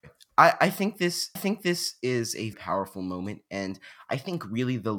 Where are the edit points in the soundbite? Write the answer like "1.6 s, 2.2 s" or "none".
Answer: 1.4 s, 2.5 s